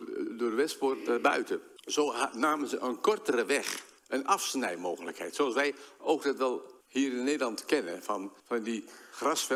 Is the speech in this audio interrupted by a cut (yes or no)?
yes